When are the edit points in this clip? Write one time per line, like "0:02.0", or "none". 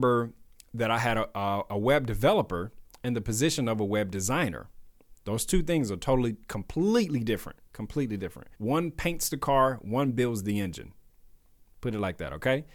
0:08.5